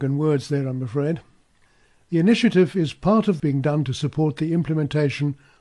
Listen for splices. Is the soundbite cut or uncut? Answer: cut